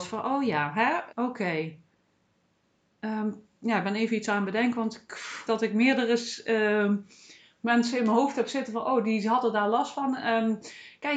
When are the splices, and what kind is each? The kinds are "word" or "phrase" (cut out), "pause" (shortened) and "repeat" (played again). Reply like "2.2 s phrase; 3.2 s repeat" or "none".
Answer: 1.1 s word; 5.5 s word